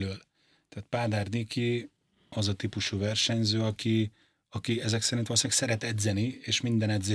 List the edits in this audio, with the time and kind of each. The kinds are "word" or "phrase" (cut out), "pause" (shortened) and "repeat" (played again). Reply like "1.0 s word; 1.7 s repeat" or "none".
none